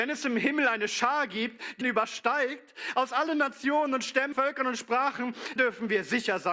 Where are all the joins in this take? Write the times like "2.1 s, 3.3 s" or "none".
1.8 s, 4.3 s, 5.6 s